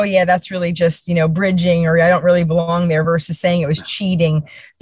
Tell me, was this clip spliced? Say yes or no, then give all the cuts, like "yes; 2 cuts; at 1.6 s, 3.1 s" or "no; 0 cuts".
no; 0 cuts